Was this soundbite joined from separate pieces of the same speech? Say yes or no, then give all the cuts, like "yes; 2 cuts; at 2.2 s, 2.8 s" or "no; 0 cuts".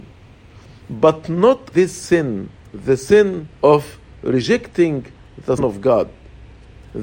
yes; 4 cuts; at 1.7 s, 2.6 s, 3.5 s, 5.6 s